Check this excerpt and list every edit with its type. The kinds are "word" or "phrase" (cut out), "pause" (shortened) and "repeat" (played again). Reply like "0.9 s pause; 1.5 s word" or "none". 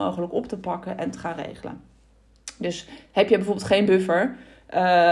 none